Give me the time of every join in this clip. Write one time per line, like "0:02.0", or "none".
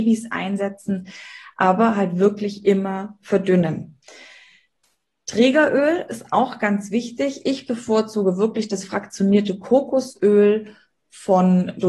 none